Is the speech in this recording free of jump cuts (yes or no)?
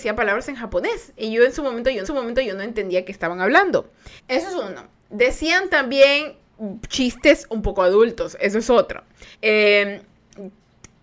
no